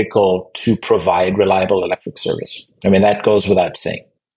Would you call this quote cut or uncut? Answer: uncut